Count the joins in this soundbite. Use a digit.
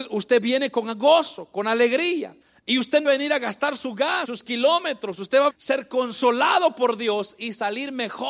4